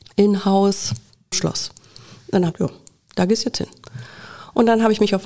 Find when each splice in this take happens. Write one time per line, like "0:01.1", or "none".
0:01.3
0:02.5